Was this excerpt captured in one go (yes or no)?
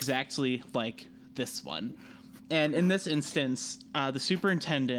yes